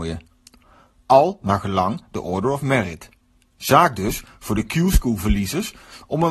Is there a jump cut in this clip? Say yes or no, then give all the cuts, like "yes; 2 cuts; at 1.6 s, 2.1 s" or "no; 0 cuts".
no; 0 cuts